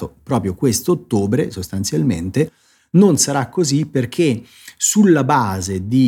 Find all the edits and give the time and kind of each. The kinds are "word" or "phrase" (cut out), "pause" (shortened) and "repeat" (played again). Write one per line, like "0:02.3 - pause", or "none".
none

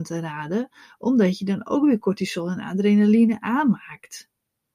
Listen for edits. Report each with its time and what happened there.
none

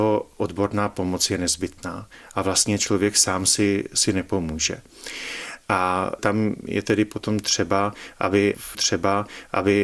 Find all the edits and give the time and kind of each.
0:08.7 - repeat

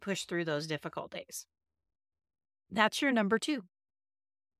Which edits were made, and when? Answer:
none

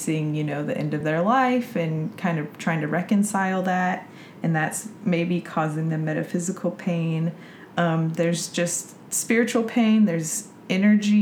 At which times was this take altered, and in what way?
none

